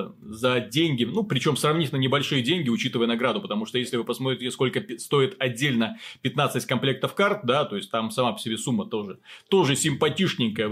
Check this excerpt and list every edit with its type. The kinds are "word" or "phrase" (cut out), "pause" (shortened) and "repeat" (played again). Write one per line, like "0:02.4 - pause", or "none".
none